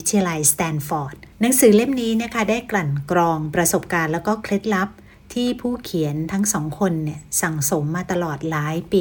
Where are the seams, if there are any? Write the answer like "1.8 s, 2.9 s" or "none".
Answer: 1.3 s